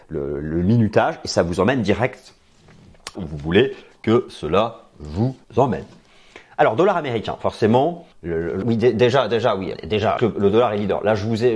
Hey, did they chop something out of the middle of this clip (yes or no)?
yes